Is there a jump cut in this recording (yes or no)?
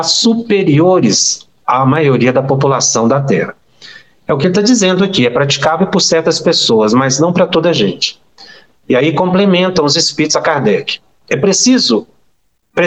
no